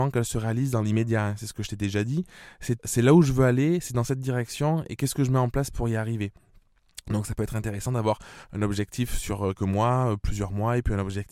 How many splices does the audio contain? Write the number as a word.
two